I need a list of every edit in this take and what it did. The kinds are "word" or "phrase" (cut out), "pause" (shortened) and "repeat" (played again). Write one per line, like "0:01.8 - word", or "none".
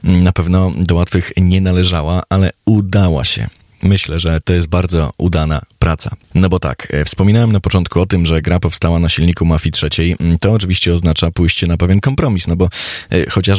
none